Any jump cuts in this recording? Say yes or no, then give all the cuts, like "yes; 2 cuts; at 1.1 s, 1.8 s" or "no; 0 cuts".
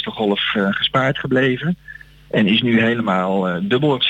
no; 0 cuts